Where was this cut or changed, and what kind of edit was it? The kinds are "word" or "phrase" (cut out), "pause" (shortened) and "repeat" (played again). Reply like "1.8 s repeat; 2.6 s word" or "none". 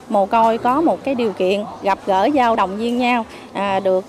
1.0 s word; 2.5 s phrase